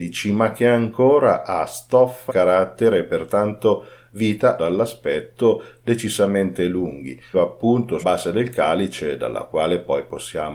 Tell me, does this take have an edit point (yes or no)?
yes